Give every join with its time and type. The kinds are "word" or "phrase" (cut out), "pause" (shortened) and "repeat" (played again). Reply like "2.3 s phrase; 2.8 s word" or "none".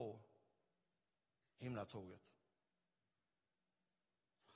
none